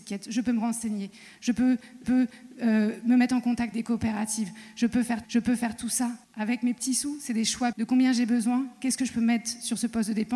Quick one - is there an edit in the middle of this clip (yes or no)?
yes